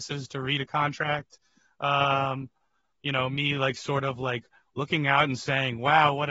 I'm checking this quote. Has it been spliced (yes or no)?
no